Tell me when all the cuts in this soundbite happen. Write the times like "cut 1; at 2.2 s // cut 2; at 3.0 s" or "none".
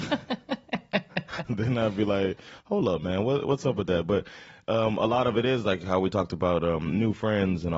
none